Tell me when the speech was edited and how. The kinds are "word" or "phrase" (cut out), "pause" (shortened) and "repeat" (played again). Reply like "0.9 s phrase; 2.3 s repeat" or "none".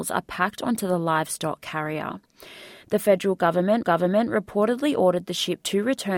3.8 s repeat